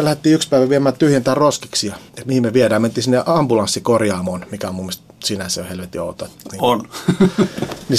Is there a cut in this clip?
yes; 1 cut; at 2.1 s

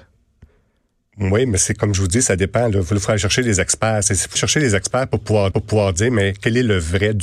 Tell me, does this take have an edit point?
yes; 2 cuts; at 4.4 s, 5.5 s

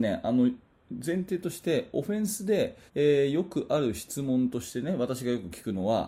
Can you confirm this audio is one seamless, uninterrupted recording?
no; 1 cut; at 2.9 s

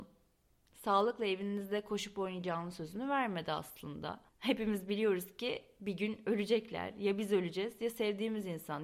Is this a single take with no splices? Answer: no; 1 cut; at 4.3 s

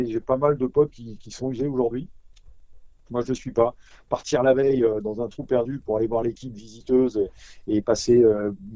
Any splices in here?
no; 0 cuts

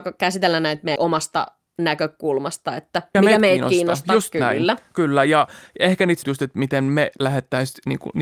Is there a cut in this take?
yes; 3 cuts; at 1.0 s, 3.1 s, 6.2 s

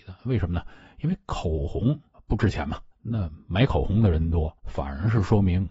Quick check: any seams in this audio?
yes; 3 cuts; at 2.1 s, 2.9 s, 4.6 s

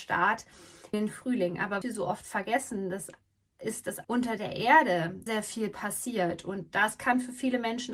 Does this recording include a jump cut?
yes; 4 cuts; at 0.9 s, 1.8 s, 4.0 s, 5.3 s

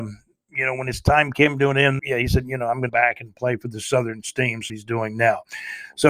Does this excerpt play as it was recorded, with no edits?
no; 3 cuts; at 2.0 s, 2.9 s, 4.7 s

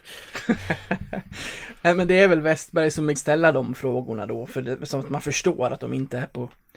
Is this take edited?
yes; 1 cut; at 3.2 s

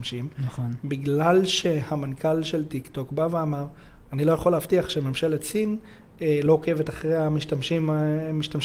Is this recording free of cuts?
yes; 0 cuts

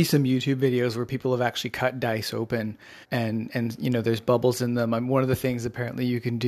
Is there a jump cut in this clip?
yes; 1 cut; at 3.0 s

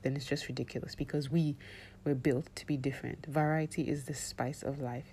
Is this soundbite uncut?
yes; 0 cuts

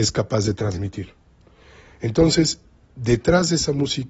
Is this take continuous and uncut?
yes; 0 cuts

